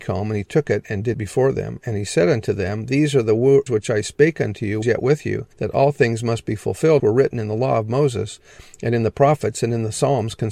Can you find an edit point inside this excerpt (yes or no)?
yes